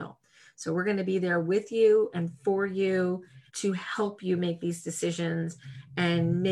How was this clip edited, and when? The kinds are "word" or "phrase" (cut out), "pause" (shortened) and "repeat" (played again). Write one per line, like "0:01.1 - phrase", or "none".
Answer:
0:03.5 - pause